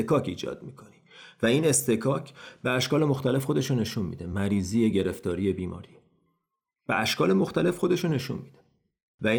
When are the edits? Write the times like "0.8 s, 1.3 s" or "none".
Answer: none